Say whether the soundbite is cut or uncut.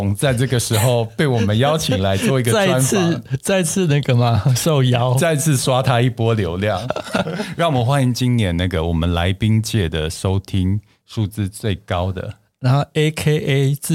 uncut